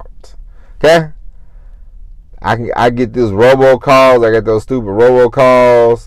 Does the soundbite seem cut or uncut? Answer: uncut